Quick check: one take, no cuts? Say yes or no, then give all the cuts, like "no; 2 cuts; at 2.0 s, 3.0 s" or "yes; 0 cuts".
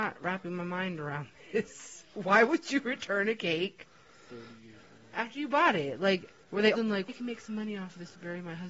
no; 3 cuts; at 6.4 s, 6.7 s, 7.1 s